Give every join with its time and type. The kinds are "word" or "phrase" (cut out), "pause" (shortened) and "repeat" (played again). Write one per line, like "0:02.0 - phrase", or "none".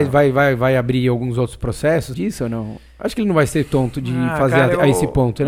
0:02.1 - phrase